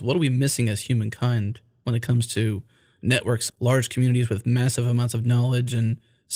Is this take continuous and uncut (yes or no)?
no